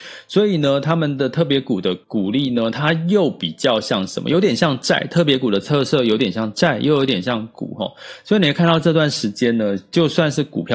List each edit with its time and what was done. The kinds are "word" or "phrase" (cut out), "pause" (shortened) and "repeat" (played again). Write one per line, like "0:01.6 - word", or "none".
0:02.0 - pause